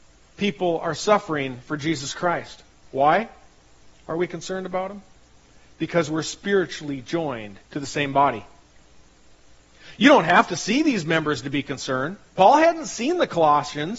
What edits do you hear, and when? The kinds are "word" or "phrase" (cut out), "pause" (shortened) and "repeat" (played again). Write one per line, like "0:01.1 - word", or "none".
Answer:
0:02.8 - pause
0:07.6 - pause
0:12.3 - pause